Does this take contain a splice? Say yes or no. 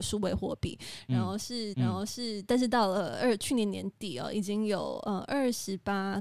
yes